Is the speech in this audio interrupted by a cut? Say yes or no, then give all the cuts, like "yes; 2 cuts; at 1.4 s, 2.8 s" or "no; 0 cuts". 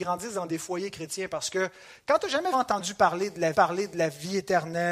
yes; 2 cuts; at 2.5 s, 3.5 s